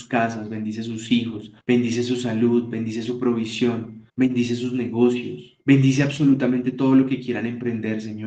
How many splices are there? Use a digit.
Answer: 3